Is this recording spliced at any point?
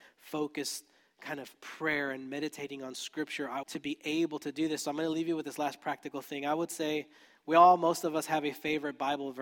yes; 1 cut; at 3.6 s

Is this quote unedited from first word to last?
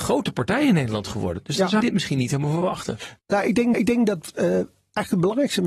no; 3 cuts; at 1.8 s, 3.2 s, 3.7 s

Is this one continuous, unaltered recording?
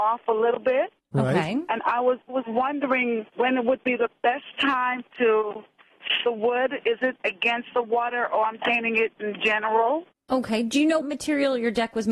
no; 6 cuts; at 2.3 s, 3.3 s, 6.3 s, 7.2 s, 8.6 s, 11.0 s

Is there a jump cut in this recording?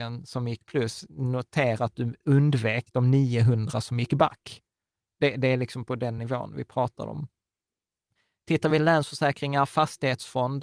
no; 0 cuts

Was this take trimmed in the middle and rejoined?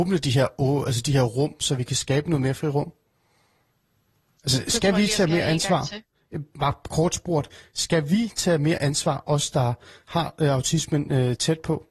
no; 0 cuts

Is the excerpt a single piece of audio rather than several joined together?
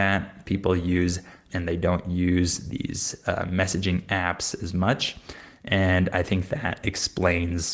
no; 1 cut; at 1.5 s

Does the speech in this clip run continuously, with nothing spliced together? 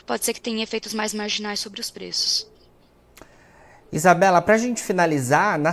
yes; 0 cuts

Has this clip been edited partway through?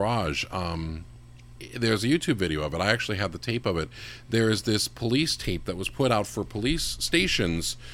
no; 0 cuts

